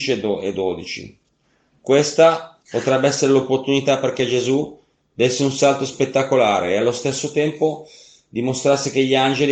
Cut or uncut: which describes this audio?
uncut